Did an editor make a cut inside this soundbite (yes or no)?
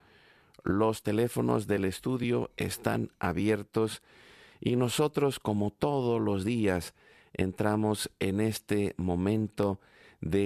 no